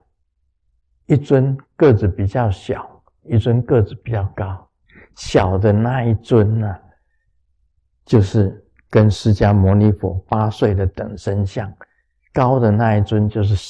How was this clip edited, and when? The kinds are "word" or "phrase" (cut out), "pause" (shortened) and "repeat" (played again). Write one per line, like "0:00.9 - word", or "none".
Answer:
none